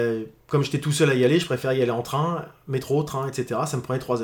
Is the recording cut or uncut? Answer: uncut